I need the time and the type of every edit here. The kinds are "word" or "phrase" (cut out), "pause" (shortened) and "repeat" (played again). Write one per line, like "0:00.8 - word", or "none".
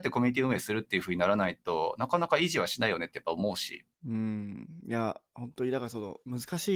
0:03.9 - pause